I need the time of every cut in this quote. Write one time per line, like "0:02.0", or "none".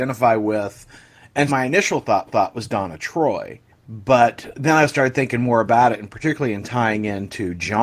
0:01.5
0:02.3